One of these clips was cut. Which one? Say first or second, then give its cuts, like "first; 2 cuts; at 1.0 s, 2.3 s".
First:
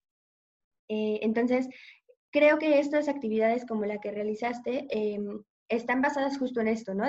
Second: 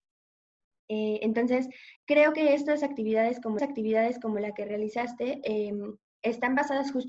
second; 2 cuts; at 2.0 s, 3.6 s